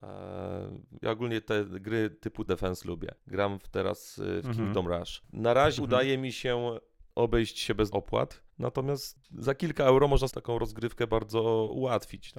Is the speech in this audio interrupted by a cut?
yes; 7 cuts; at 2.5 s, 3.2 s, 5.8 s, 7.1 s, 7.9 s, 8.5 s, 10.3 s

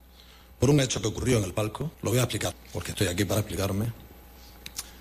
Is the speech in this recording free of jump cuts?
no; 2 cuts; at 1.9 s, 2.5 s

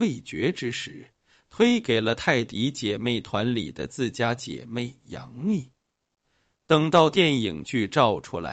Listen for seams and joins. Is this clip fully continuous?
yes; 0 cuts

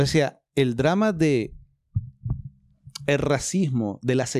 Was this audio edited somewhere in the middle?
no; 0 cuts

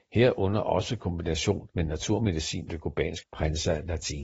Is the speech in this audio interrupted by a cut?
yes; 3 cuts; at 1.7 s, 2.7 s, 3.2 s

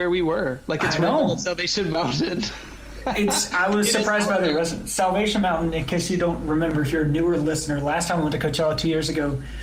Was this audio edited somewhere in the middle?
no; 0 cuts

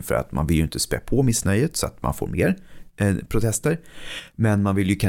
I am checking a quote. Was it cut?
no; 0 cuts

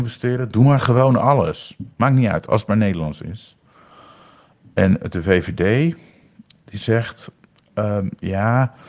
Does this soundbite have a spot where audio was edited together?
yes; 1 cut; at 1.9 s

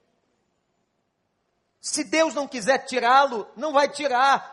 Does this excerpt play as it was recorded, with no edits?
yes; 0 cuts

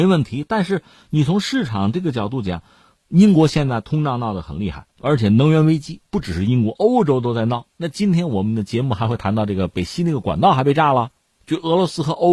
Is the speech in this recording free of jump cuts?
no; 2 cuts; at 4.9 s, 7.7 s

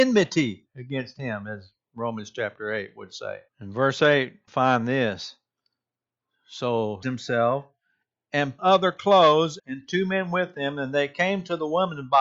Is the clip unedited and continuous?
no; 5 cuts; at 3.5 s, 4.5 s, 7.0 s, 8.6 s, 9.6 s

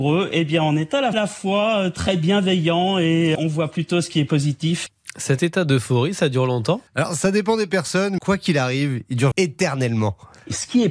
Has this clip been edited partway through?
yes; 5 cuts; at 1.1 s, 3.4 s, 6.9 s, 8.2 s, 9.3 s

